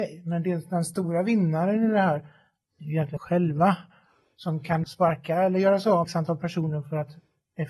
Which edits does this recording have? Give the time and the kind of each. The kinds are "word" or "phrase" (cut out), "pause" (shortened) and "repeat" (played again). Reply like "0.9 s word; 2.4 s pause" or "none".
3.2 s word; 4.8 s word; 6.0 s word